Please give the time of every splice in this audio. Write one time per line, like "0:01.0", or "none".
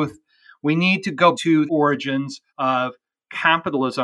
0:01.3
0:01.7
0:02.5

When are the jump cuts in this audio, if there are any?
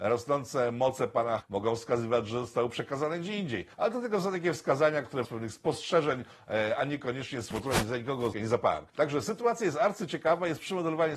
0:01.4
0:03.7
0:05.2
0:07.5
0:08.3
0:08.9

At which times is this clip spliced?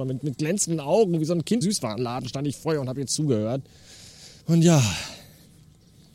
0:01.6
0:04.4

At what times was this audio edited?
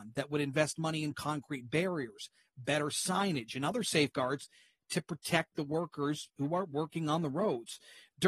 none

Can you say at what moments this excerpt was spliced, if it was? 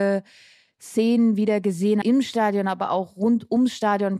0:02.0

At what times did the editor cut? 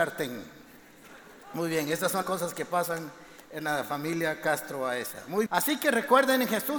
0:02.2
0:05.5

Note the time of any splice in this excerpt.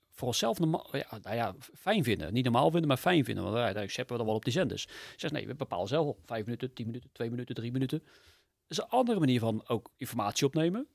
none

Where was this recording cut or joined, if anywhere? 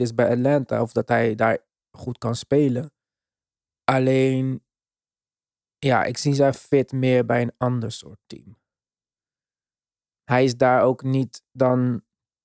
none

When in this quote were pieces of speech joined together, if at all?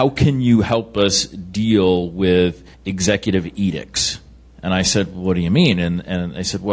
0:02.7

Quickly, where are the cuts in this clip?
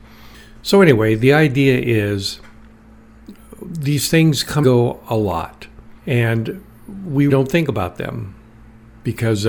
0:04.6
0:06.0
0:07.3

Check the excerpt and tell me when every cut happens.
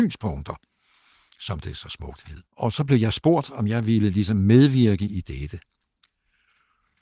0:02.5

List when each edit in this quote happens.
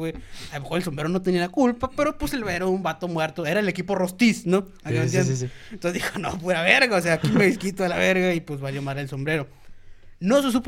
none

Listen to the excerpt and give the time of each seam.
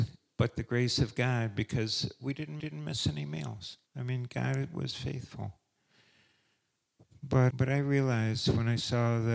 0:02.6
0:03.9
0:07.5

